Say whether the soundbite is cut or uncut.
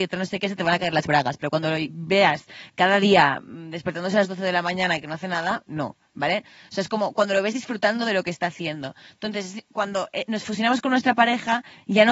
uncut